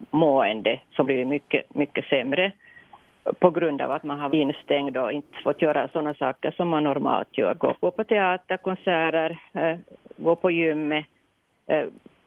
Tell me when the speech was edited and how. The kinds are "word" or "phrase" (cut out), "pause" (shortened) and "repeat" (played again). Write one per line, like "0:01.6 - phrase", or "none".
0:01.0 - word
0:04.3 - word
0:07.7 - word